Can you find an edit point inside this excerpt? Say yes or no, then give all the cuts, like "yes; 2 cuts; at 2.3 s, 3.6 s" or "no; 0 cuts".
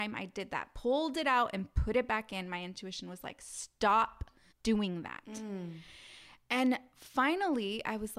yes; 1 cut; at 4.5 s